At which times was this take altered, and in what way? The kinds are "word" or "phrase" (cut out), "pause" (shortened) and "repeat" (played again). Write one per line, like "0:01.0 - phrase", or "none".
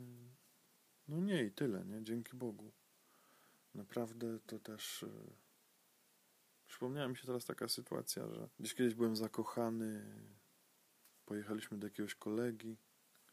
0:08.5 - pause